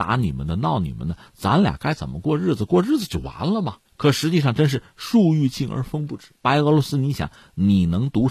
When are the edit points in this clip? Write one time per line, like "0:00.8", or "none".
0:03.8
0:06.4